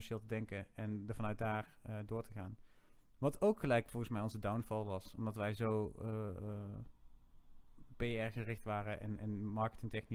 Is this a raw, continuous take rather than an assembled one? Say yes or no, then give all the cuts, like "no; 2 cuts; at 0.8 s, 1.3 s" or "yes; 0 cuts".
yes; 0 cuts